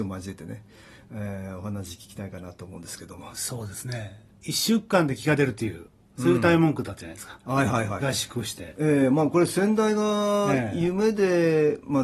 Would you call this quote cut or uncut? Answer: cut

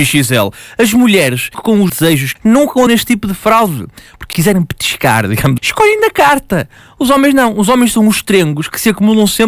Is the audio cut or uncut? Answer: cut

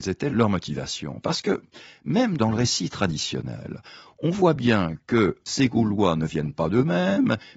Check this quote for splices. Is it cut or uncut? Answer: uncut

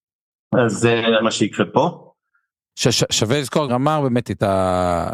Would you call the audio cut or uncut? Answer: cut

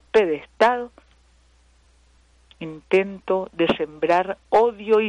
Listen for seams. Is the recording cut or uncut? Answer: uncut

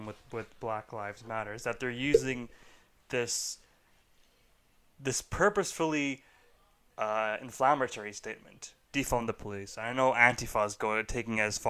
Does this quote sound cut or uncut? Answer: uncut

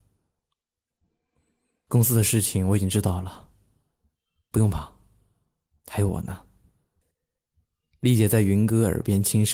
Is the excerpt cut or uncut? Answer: uncut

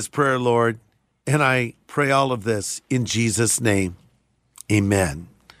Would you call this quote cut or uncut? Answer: uncut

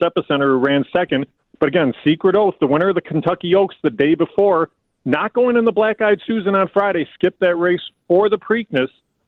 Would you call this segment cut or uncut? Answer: uncut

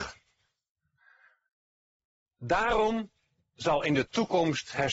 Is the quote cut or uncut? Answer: cut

